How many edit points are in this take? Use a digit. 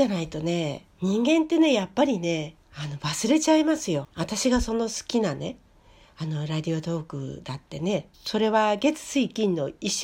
4